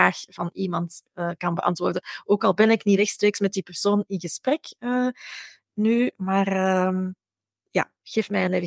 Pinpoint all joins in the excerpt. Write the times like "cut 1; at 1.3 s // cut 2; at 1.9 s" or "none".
none